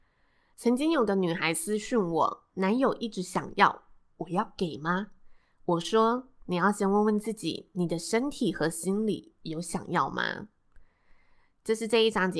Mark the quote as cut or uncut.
uncut